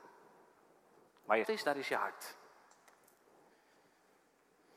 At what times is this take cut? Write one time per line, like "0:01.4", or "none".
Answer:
0:01.4